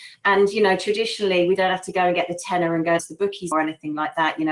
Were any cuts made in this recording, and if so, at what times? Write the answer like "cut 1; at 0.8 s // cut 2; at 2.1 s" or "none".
cut 1; at 3.0 s // cut 2; at 3.5 s